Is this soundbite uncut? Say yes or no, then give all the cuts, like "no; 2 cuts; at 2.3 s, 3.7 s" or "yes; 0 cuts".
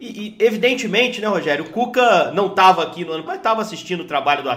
no; 1 cut; at 3.3 s